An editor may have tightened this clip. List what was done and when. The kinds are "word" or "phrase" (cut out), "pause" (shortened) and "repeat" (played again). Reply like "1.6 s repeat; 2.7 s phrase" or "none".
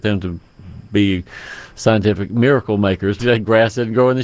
3.2 s word